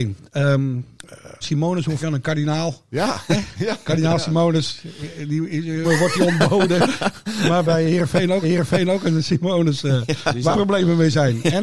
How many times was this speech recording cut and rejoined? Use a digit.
6